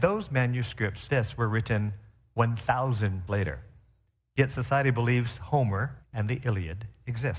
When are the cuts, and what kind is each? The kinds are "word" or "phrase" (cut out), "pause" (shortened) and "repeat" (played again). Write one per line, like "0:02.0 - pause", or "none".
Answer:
0:01.1 - word
0:03.3 - word
0:06.0 - pause